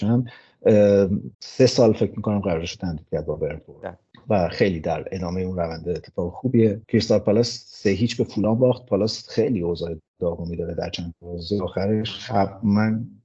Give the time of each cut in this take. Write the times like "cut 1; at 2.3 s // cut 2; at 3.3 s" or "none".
cut 1; at 1.3 s // cut 2; at 6.8 s